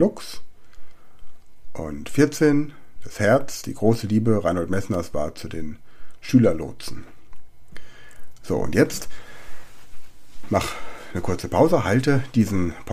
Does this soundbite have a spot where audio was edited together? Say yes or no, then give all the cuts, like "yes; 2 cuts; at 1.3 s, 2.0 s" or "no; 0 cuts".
no; 0 cuts